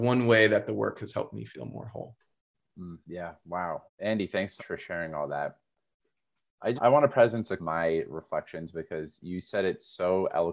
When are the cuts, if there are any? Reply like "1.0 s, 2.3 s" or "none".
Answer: 3.0 s, 3.9 s, 4.6 s, 6.8 s, 7.6 s, 9.2 s